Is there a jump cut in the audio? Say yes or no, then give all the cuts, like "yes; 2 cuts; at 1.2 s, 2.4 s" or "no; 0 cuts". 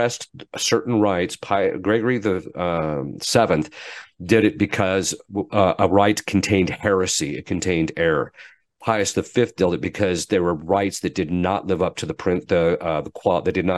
no; 0 cuts